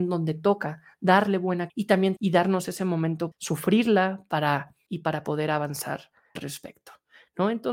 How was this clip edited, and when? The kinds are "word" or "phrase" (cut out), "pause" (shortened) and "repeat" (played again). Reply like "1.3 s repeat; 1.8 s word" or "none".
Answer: 1.7 s word; 2.2 s word; 3.3 s word; 4.9 s word; 6.4 s word